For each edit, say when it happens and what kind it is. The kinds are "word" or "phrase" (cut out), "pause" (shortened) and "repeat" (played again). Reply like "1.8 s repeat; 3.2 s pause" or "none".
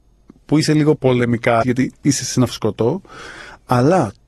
1.0 s word; 1.6 s word